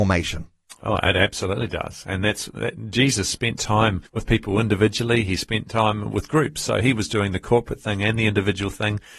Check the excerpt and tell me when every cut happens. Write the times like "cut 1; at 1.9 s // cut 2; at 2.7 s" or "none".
cut 1; at 4.1 s